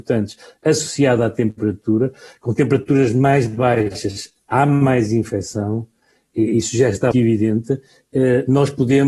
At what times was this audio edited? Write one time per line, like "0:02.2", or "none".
0:07.1